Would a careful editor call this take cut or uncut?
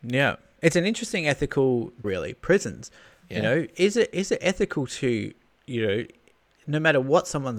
cut